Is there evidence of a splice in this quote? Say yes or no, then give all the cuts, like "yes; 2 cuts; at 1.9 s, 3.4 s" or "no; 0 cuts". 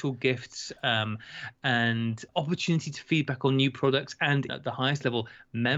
yes; 2 cuts; at 2.3 s, 4.5 s